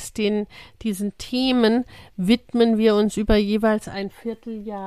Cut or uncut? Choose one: uncut